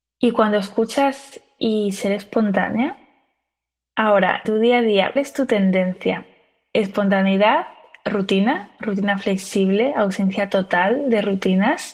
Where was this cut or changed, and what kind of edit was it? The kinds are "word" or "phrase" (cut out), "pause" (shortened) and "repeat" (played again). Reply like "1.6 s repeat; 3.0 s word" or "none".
1.6 s word; 4.4 s word; 5.2 s word